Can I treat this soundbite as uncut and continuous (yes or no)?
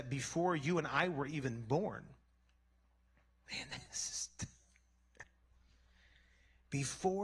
yes